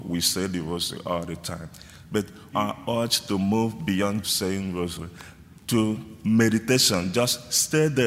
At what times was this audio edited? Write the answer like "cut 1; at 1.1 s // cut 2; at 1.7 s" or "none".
cut 1; at 2.5 s // cut 2; at 4.2 s